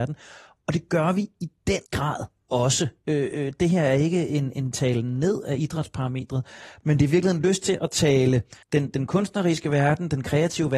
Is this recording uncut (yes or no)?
no